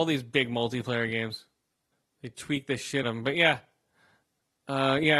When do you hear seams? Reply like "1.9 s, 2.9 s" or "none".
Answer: 1.9 s, 3.0 s